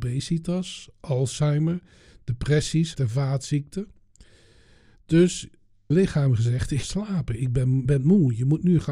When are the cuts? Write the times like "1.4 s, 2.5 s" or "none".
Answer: 2.9 s, 5.9 s, 6.8 s, 7.9 s